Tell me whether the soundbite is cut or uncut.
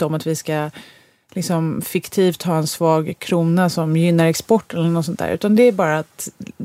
uncut